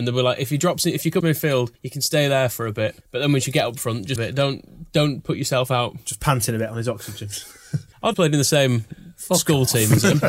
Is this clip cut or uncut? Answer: cut